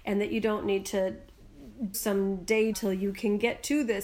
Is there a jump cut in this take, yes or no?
yes